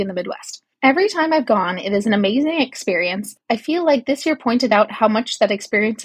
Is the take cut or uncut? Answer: uncut